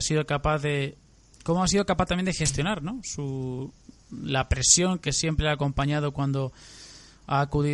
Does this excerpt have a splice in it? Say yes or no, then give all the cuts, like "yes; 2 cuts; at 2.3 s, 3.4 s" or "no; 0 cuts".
no; 0 cuts